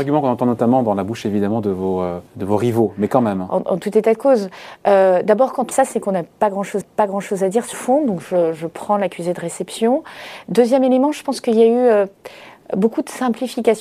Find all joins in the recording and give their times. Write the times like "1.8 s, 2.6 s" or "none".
2.3 s, 5.7 s, 6.8 s, 7.7 s